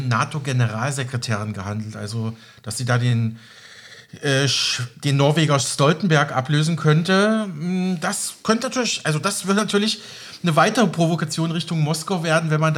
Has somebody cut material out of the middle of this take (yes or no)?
no